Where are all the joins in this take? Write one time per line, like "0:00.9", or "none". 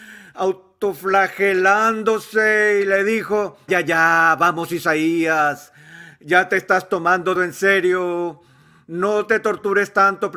0:03.7
0:07.4